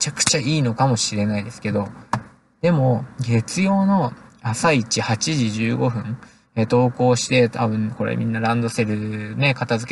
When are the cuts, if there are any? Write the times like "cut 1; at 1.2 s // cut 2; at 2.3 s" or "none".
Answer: none